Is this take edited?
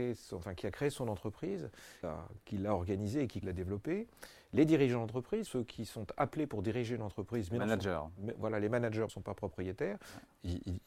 yes; 4 cuts; at 2.0 s, 3.4 s, 5.5 s, 9.1 s

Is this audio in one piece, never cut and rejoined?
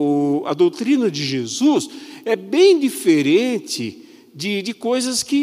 yes; 0 cuts

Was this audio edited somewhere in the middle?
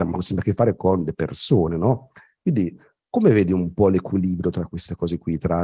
no; 0 cuts

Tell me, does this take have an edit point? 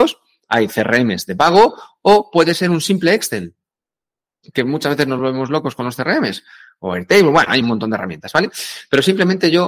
no; 0 cuts

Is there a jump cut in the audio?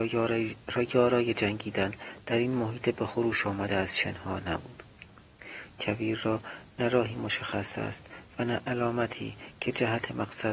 no; 0 cuts

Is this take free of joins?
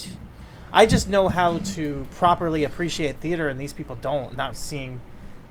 no; 1 cut; at 4.5 s

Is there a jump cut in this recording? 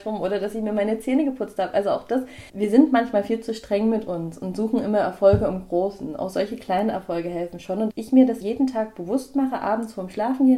yes; 3 cuts; at 2.5 s, 7.9 s, 8.4 s

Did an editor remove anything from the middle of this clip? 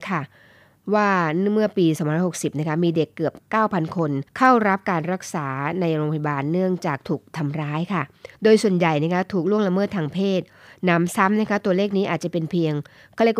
yes; 2 cuts; at 4.3 s, 8.3 s

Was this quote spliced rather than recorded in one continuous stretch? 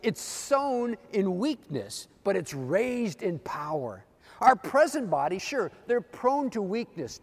yes; 1 cut; at 4.2 s

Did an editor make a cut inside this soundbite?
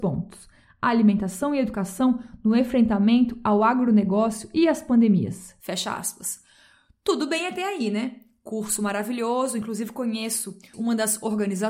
no; 0 cuts

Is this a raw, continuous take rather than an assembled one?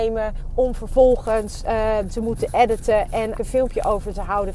no; 2 cuts; at 2.1 s, 3.4 s

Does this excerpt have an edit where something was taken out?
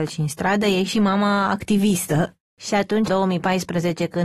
yes; 2 cuts; at 2.5 s, 3.1 s

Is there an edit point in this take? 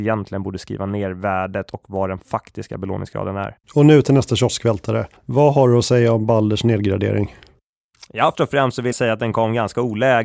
yes; 4 cuts; at 3.6 s, 5.2 s, 8.3 s, 8.9 s

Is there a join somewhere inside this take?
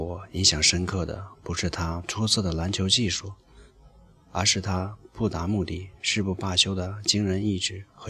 no; 0 cuts

